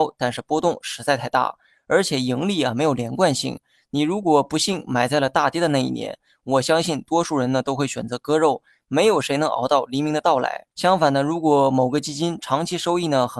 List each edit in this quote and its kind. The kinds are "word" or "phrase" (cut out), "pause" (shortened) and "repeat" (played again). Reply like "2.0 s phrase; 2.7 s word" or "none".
10.7 s pause